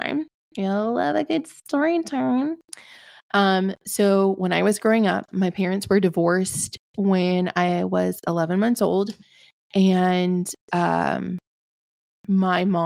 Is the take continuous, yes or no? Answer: yes